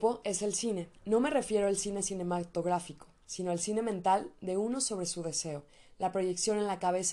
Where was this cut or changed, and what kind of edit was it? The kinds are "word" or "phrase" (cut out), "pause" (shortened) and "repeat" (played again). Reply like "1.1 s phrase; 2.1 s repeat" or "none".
none